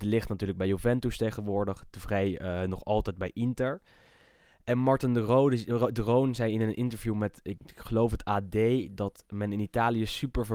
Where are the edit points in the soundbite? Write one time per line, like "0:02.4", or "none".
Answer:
none